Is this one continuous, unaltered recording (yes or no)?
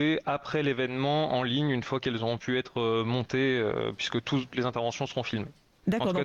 no